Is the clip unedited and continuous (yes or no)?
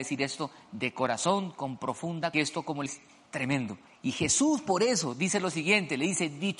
no